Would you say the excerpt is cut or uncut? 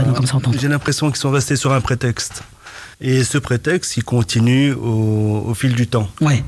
cut